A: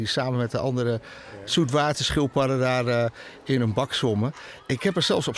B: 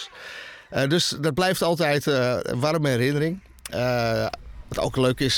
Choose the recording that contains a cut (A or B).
A